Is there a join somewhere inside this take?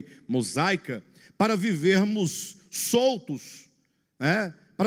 no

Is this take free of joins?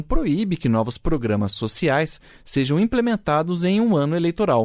yes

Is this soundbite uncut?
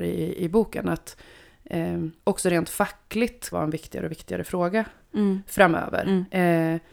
no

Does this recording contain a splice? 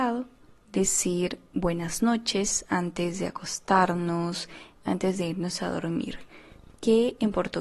no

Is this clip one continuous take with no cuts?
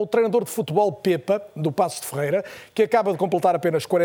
yes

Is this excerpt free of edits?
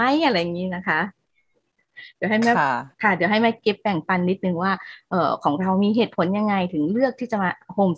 no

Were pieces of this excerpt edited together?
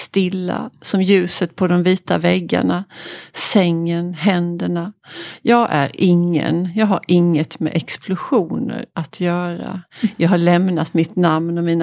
no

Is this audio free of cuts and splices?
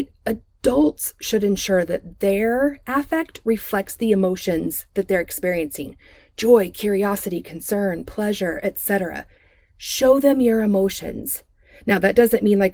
yes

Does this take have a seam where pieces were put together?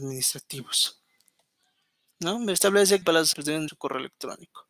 yes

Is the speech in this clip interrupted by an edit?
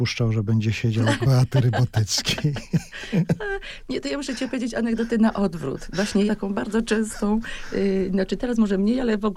yes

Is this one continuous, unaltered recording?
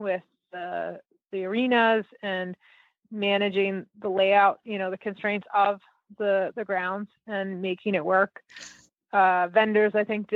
yes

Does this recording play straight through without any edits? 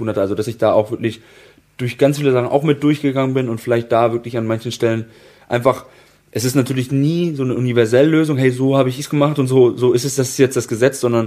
yes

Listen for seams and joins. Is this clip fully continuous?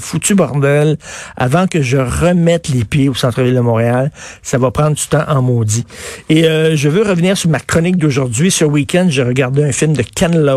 yes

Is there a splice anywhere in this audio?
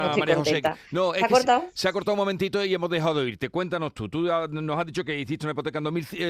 no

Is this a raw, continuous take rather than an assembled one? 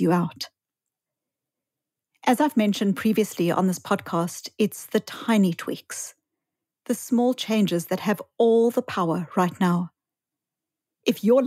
yes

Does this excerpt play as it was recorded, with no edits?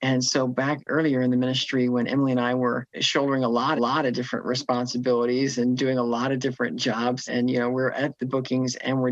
no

